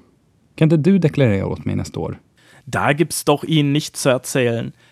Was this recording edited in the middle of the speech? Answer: no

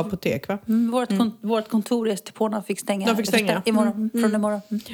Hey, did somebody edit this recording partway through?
no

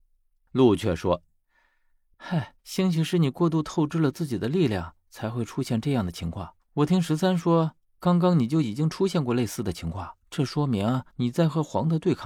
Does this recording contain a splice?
yes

